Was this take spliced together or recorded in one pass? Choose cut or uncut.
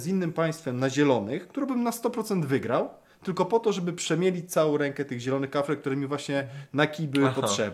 uncut